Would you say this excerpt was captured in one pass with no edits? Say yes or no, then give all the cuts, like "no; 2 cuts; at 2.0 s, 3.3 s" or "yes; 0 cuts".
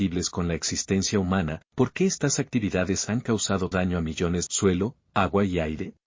no; 3 cuts; at 1.6 s, 3.7 s, 4.5 s